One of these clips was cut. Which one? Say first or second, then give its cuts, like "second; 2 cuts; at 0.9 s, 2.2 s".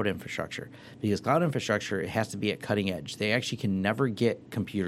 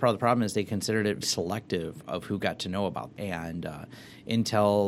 second; 2 cuts; at 1.2 s, 3.1 s